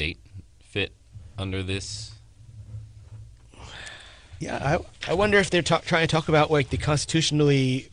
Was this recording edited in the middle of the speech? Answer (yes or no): no